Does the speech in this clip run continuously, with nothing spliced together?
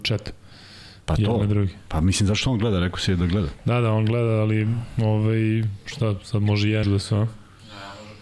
no; 1 cut; at 6.8 s

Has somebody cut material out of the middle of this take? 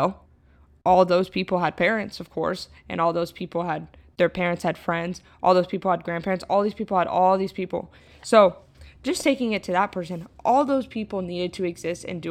no; 0 cuts

